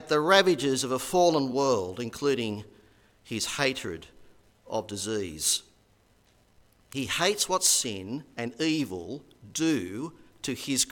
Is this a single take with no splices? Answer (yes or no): yes